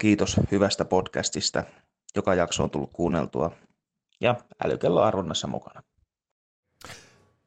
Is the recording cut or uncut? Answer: uncut